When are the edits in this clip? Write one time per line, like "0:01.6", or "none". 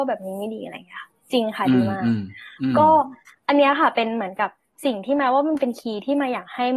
none